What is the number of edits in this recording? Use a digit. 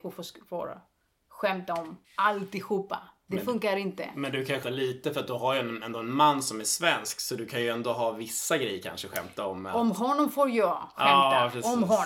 2